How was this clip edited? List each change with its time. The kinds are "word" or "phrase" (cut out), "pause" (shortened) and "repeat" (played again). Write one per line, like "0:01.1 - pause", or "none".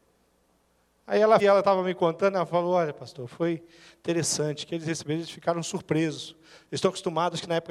0:01.4 - word